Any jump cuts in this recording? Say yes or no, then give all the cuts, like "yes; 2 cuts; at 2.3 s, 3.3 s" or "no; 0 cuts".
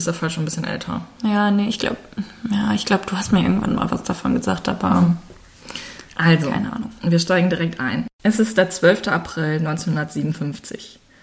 yes; 1 cut; at 8.1 s